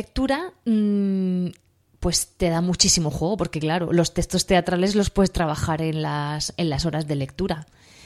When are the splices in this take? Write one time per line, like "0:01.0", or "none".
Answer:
none